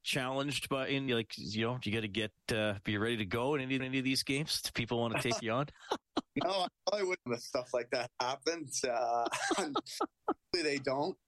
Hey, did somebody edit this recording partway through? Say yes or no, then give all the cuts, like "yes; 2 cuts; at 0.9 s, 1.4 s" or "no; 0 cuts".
yes; 3 cuts; at 1.1 s, 3.8 s, 7.3 s